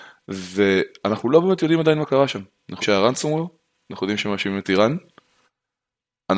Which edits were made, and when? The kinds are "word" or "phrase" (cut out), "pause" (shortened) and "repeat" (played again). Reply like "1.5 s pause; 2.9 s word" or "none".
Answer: 2.8 s word